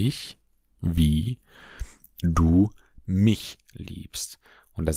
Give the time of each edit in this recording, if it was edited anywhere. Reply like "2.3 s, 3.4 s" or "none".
none

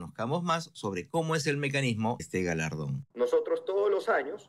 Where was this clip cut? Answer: 2.2 s, 3.1 s

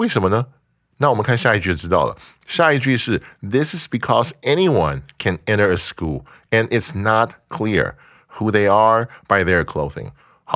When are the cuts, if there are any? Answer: none

